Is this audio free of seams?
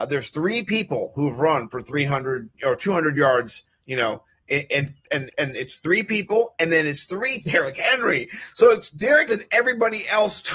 no; 4 cuts; at 2.5 s, 5.3 s, 7.4 s, 9.3 s

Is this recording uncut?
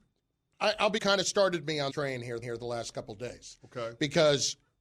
no; 3 cuts; at 1.0 s, 1.9 s, 2.4 s

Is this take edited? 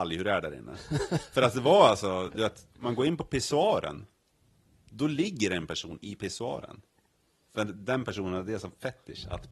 no; 0 cuts

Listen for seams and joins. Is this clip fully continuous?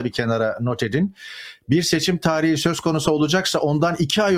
yes; 0 cuts

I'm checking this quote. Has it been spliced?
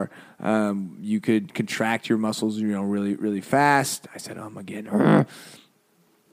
no; 0 cuts

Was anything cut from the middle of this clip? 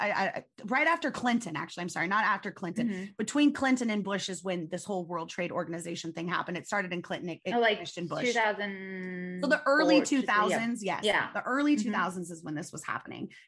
no; 0 cuts

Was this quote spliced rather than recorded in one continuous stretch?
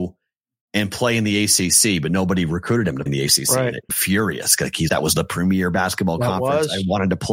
yes; 3 cuts; at 3.1 s, 3.9 s, 4.9 s

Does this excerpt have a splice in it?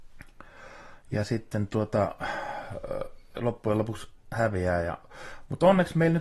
no; 0 cuts

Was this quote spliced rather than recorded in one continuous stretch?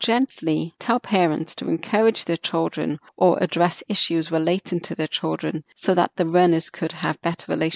no; 0 cuts

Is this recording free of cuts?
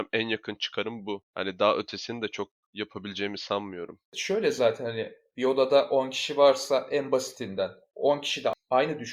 no; 1 cut; at 1.3 s

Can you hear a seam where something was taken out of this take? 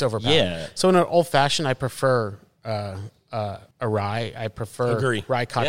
yes; 1 cut; at 3.7 s

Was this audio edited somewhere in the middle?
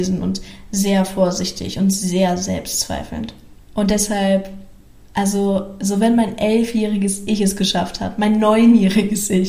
no; 0 cuts

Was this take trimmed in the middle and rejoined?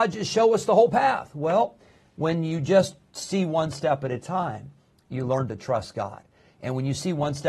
no; 0 cuts

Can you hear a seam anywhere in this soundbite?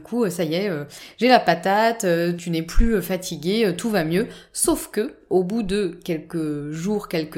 yes; 1 cut; at 2.4 s

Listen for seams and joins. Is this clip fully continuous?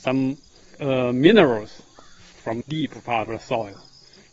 no; 2 cuts; at 2.6 s, 3.3 s

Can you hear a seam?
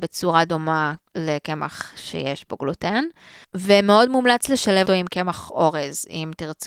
yes; 3 cuts; at 1.1 s, 3.4 s, 4.9 s

